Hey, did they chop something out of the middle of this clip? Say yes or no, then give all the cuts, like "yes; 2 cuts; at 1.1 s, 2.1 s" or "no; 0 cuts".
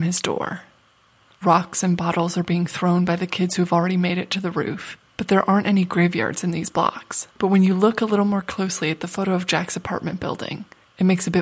yes; 2 cuts; at 5.1 s, 7.3 s